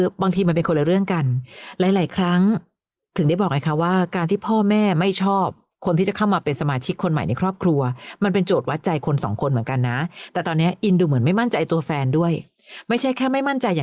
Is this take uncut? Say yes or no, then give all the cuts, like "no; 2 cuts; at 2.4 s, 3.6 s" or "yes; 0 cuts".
yes; 0 cuts